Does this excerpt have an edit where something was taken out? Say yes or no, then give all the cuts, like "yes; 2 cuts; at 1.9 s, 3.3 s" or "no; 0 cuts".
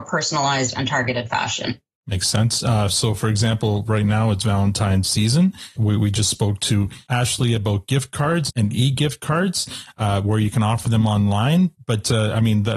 no; 0 cuts